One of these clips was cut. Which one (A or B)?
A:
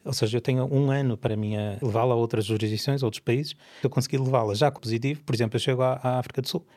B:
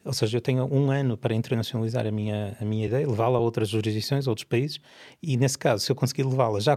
A